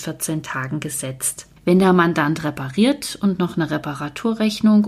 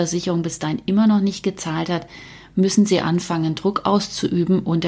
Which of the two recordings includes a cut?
first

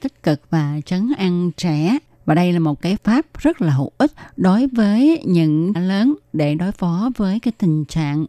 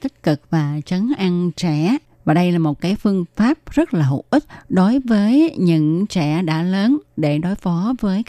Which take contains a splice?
first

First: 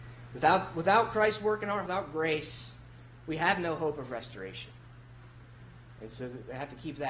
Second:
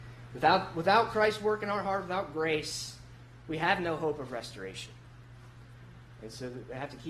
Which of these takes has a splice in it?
first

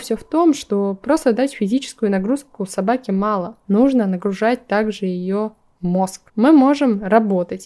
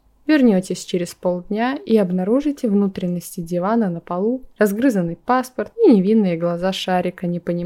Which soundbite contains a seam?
first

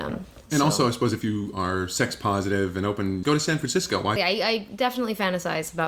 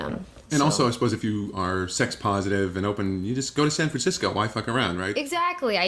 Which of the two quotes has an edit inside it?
first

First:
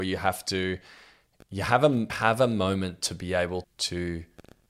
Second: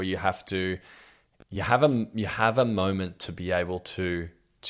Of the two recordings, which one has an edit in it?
first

